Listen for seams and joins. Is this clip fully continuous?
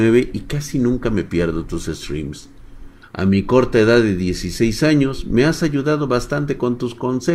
yes; 0 cuts

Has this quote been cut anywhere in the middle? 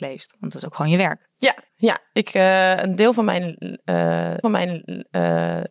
yes; 2 cuts; at 1.7 s, 4.4 s

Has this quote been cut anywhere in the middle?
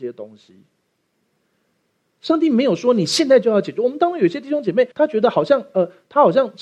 yes; 1 cut; at 4.9 s

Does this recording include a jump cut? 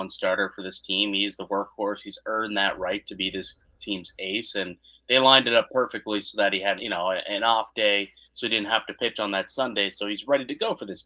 yes; 1 cut; at 6.8 s

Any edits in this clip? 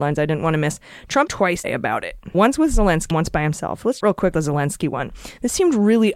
yes; 6 cuts; at 1.3 s, 1.6 s, 2.3 s, 3.1 s, 4.0 s, 4.3 s

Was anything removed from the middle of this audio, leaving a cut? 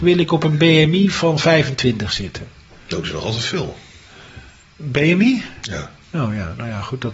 no; 0 cuts

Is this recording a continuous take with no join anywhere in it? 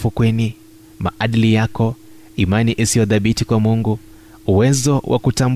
yes; 0 cuts

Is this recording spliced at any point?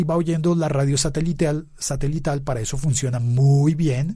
no; 0 cuts

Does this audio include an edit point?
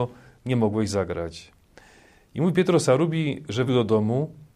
yes; 1 cut; at 3.7 s

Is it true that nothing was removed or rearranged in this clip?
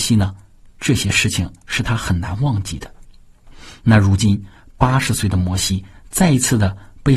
yes; 0 cuts

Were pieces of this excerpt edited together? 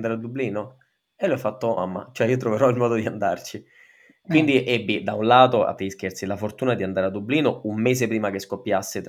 yes; 2 cuts; at 1.8 s, 5.8 s

